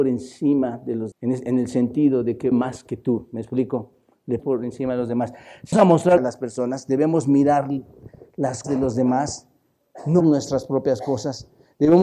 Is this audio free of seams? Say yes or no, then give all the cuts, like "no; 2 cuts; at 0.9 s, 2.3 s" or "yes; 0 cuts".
no; 7 cuts; at 1.1 s, 2.5 s, 4.4 s, 5.7 s, 6.2 s, 8.6 s, 10.2 s